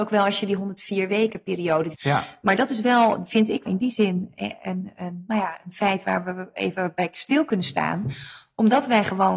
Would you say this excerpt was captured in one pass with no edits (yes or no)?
no